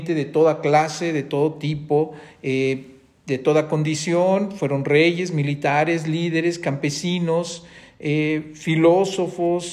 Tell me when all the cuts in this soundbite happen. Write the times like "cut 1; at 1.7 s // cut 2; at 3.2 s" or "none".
none